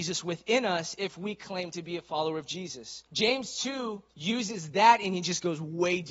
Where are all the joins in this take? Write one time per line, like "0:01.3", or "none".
0:03.1
0:04.1